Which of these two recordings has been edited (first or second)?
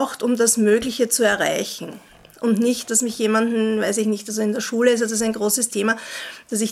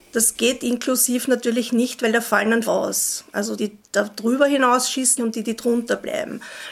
second